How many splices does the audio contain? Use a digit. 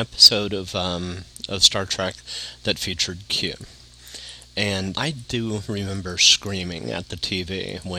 1